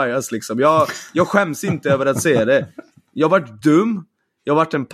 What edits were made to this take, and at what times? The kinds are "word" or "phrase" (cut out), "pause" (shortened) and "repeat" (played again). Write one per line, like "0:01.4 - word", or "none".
none